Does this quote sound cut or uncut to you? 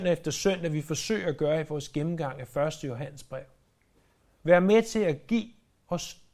uncut